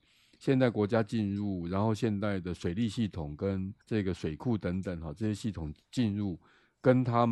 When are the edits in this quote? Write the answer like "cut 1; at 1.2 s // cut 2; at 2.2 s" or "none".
cut 1; at 3.8 s

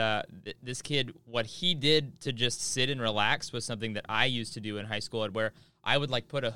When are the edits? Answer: none

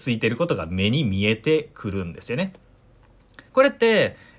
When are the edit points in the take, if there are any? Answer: cut 1; at 3.5 s

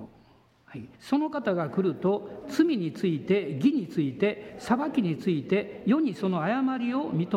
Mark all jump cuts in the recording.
cut 1; at 0.9 s

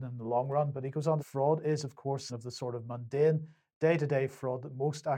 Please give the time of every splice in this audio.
cut 1; at 1.2 s // cut 2; at 2.3 s

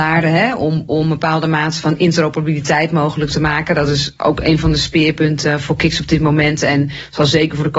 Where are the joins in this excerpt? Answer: none

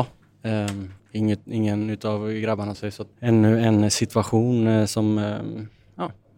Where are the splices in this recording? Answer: cut 1; at 1.0 s // cut 2; at 2.7 s // cut 3; at 3.1 s

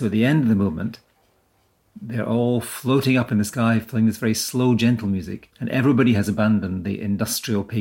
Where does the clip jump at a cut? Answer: cut 1; at 5.5 s

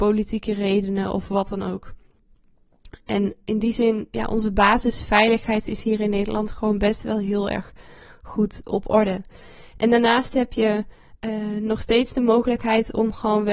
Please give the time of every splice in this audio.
none

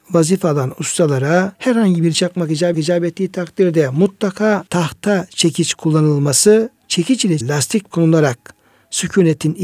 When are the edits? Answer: cut 1; at 1.5 s // cut 2; at 2.1 s // cut 3; at 2.7 s // cut 4; at 4.7 s // cut 5; at 6.8 s // cut 6; at 7.4 s // cut 7; at 7.9 s

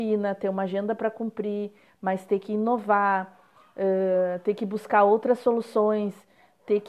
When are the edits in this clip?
none

